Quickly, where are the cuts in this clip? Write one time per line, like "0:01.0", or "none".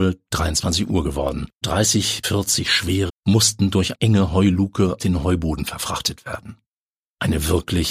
0:01.6
0:02.2
0:03.1
0:03.9
0:05.0

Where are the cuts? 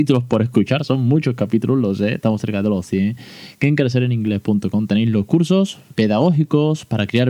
0:05.9

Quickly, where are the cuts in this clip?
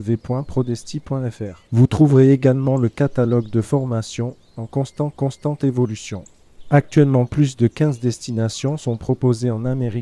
0:01.7
0:05.1

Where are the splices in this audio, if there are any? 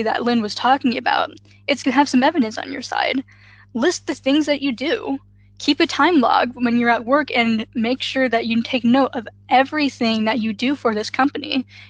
0:01.8

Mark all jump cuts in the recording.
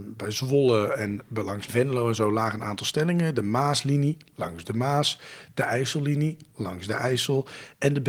0:01.7

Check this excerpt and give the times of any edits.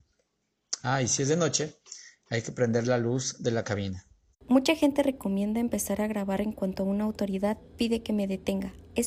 0:04.3

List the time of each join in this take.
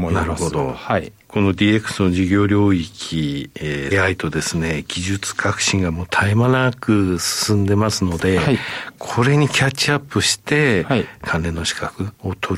0:03.9

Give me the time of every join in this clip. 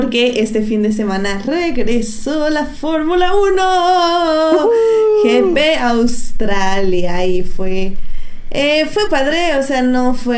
0:09.1

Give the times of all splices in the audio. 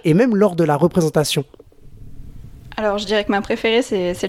none

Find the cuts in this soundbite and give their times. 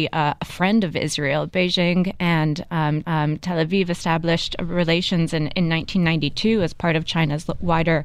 0:03.0

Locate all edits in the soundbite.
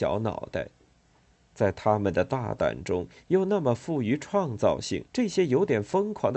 0:05.1

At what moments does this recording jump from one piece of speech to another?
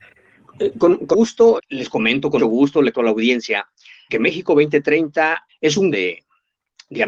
0:01.1
0:01.6
0:02.4
0:02.9
0:04.1
0:05.5
0:05.9

